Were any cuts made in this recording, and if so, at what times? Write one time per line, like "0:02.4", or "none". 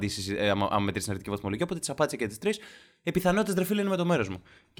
none